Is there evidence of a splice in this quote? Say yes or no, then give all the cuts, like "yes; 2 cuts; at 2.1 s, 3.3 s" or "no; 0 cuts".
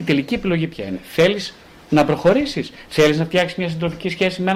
no; 0 cuts